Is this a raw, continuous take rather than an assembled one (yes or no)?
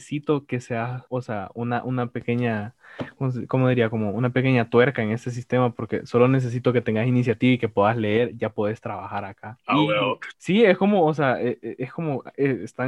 yes